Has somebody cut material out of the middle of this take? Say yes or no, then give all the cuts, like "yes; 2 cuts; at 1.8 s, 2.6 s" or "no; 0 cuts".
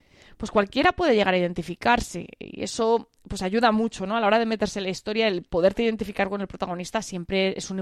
no; 0 cuts